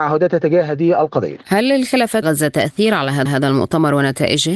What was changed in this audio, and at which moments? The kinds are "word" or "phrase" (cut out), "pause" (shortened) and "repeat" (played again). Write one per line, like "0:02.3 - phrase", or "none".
0:02.2 - phrase
0:03.3 - repeat